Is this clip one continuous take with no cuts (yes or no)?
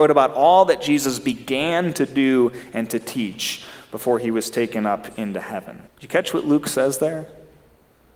no